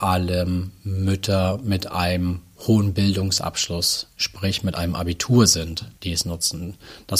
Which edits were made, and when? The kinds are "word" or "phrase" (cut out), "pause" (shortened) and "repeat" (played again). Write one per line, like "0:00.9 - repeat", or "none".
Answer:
0:06.0 - pause